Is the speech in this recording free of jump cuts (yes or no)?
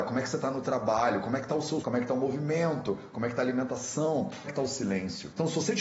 no